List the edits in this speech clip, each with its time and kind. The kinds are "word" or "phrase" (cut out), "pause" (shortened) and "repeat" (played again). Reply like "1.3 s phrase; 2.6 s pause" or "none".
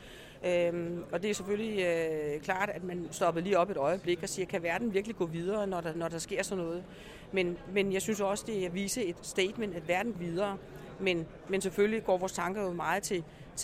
10.1 s word